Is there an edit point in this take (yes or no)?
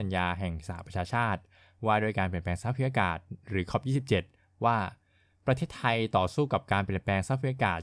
no